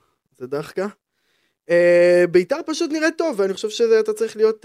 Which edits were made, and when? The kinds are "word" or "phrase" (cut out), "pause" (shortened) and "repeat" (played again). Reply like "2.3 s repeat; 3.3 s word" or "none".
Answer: none